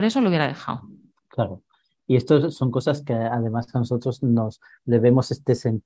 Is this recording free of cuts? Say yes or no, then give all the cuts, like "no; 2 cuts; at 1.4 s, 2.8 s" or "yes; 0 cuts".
yes; 0 cuts